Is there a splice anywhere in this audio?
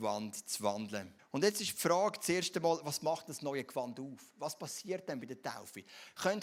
yes; 1 cut; at 1.2 s

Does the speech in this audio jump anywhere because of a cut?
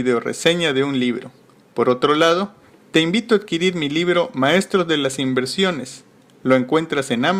no; 0 cuts

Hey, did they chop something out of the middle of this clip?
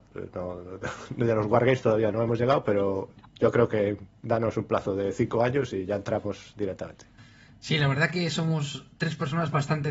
no; 0 cuts

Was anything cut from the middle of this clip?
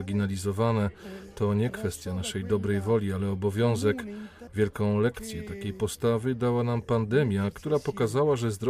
no; 0 cuts

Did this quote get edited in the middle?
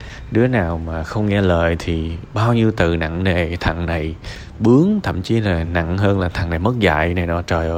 no; 0 cuts

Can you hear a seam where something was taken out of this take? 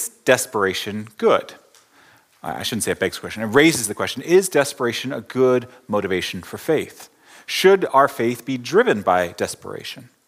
no; 0 cuts

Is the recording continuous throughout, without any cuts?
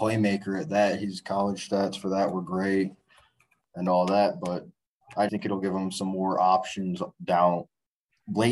no; 1 cut; at 5.3 s

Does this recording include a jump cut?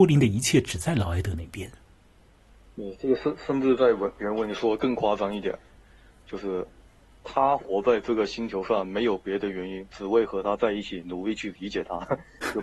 no; 0 cuts

